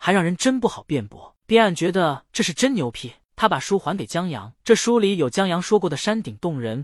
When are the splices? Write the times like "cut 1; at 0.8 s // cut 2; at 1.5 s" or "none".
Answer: cut 1; at 2.3 s // cut 2; at 4.6 s